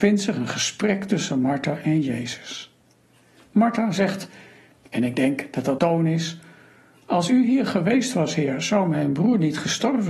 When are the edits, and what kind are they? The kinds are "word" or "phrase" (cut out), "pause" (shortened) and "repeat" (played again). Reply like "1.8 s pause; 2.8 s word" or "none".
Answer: 5.8 s phrase